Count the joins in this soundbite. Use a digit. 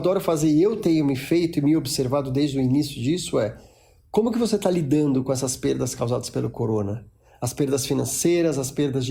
0